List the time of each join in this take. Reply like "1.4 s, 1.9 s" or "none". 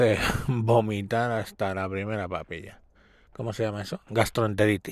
none

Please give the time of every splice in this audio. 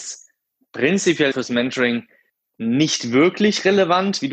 1.3 s

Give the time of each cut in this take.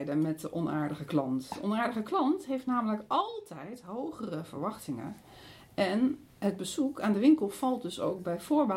none

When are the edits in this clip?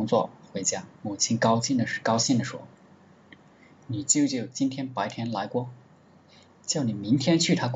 0.9 s, 2.7 s

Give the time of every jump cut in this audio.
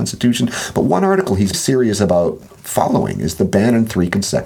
1.5 s, 2.5 s

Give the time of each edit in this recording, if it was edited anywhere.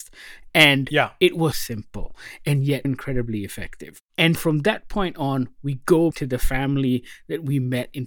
1.5 s, 2.8 s, 4.3 s, 6.1 s

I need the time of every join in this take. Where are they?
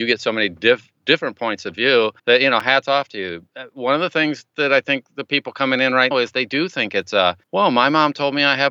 2.2 s, 6.1 s, 7.4 s

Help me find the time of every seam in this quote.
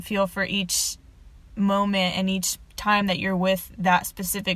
none

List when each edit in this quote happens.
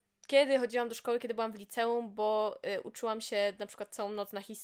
none

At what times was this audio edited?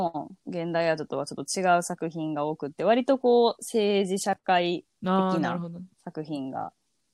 4.9 s, 5.9 s

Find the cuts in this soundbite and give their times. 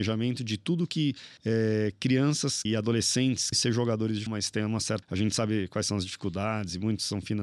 1.4 s, 2.7 s, 3.5 s, 4.3 s, 5.0 s

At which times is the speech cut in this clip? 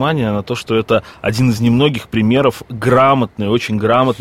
none

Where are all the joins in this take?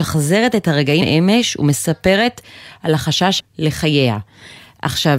1.0 s, 3.4 s

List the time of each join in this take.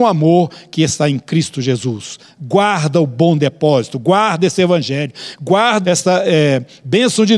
5.8 s

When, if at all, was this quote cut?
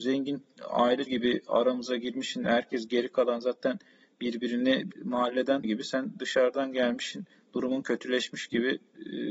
1.1 s, 4.9 s, 5.6 s

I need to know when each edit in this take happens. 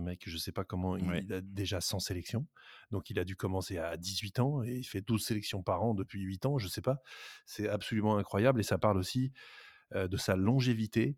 none

